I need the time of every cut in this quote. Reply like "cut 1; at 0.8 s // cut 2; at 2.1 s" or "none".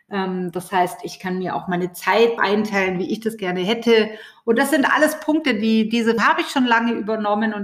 cut 1; at 2.4 s // cut 2; at 6.2 s